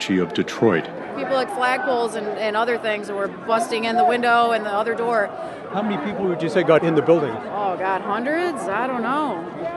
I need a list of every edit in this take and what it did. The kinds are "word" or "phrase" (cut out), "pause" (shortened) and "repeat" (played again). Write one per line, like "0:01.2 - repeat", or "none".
0:01.5 - phrase
0:06.8 - word